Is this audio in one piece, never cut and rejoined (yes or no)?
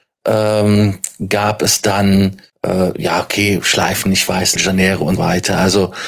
no